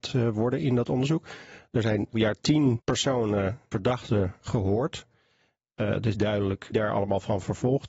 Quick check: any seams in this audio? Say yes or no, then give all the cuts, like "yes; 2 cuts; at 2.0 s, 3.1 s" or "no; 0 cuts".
yes; 4 cuts; at 2.1 s, 3.7 s, 6.1 s, 6.7 s